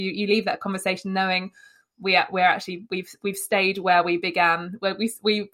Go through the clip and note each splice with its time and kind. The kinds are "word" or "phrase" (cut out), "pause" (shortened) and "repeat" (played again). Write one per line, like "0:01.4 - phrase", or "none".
none